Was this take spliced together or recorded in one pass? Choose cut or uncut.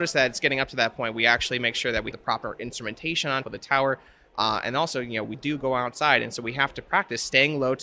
cut